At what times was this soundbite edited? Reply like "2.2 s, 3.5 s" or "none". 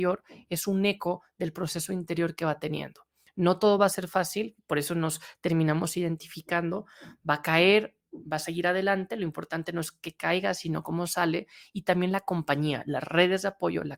none